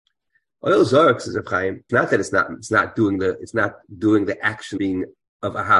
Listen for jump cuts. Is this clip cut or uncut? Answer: cut